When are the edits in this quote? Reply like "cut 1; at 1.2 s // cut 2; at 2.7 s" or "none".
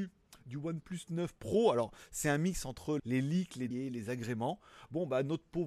cut 1; at 3.0 s // cut 2; at 3.7 s